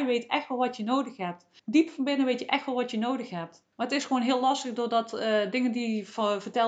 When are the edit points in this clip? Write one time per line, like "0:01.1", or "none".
0:01.6
0:03.7